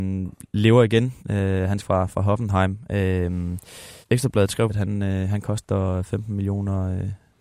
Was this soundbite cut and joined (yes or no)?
yes